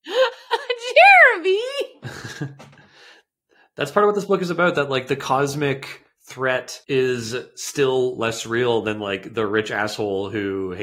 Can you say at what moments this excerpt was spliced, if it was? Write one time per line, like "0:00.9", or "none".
0:06.8